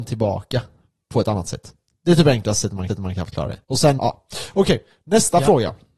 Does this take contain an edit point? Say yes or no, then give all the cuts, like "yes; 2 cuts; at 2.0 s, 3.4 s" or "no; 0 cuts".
yes; 4 cuts; at 1.9 s, 2.9 s, 3.6 s, 4.0 s